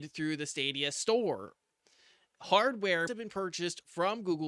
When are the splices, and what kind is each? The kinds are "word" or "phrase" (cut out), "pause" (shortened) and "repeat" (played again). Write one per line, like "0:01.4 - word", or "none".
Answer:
0:03.1 - word